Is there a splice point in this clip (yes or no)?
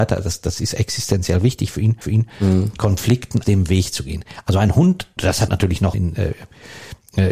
yes